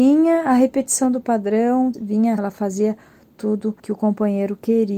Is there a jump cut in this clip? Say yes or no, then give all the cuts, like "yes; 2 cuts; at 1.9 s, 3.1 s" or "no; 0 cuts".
yes; 3 cuts; at 1.9 s, 2.4 s, 3.8 s